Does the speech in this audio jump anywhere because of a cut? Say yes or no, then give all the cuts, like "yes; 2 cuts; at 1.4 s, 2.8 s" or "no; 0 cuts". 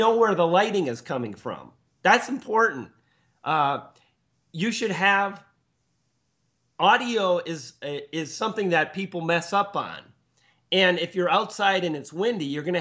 no; 0 cuts